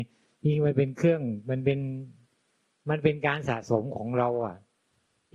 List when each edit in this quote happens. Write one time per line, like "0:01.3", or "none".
none